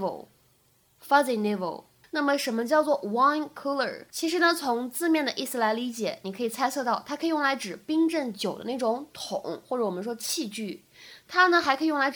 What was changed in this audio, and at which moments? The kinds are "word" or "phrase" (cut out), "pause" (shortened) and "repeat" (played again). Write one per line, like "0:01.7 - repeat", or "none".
0:02.0 - pause
0:04.1 - pause